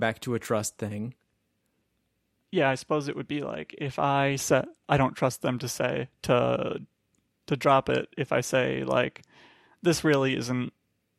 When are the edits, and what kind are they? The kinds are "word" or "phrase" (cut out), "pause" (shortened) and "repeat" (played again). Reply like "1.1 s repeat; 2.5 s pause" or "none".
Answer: none